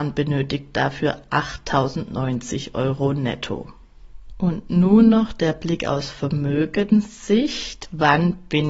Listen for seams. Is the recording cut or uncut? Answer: uncut